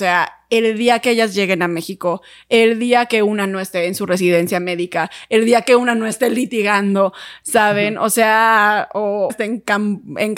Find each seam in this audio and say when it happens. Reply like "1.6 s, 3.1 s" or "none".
9.3 s